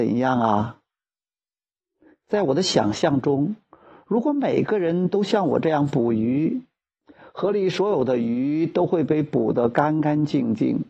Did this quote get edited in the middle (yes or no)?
no